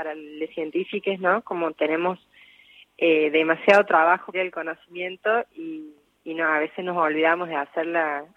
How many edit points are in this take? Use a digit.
1